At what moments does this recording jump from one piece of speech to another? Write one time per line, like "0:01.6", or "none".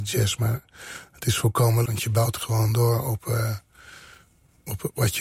0:01.9